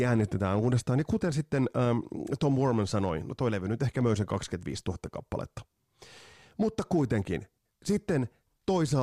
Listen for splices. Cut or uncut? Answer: uncut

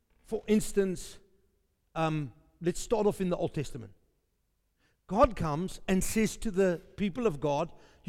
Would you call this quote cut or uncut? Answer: uncut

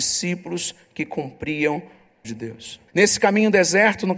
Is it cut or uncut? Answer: cut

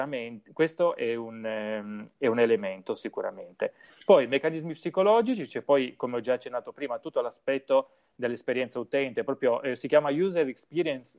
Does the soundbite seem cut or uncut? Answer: uncut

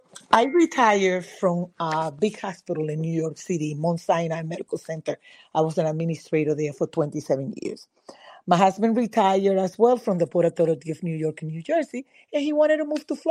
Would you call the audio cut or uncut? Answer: uncut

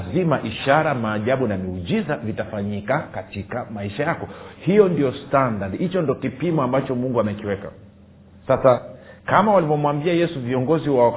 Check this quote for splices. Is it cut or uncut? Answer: uncut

